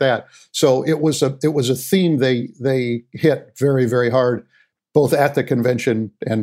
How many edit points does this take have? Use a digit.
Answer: 0